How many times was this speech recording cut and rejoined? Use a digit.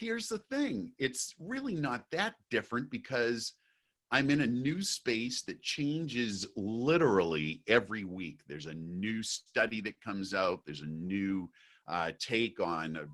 0